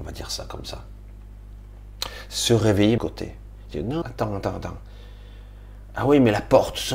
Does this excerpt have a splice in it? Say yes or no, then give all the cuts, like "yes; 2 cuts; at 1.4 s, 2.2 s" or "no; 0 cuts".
yes; 2 cuts; at 3.0 s, 4.0 s